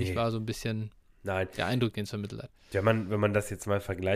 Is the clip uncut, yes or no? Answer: yes